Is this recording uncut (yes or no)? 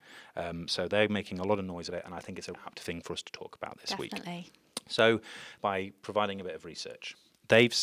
no